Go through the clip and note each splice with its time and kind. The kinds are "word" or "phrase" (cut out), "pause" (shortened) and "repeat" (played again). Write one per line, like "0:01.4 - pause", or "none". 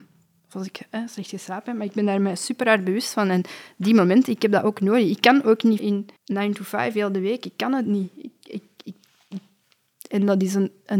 0:05.8 - word
0:06.2 - pause